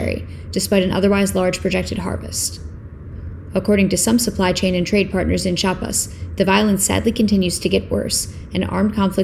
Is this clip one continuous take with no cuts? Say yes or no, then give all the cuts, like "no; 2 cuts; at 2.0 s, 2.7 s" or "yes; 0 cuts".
yes; 0 cuts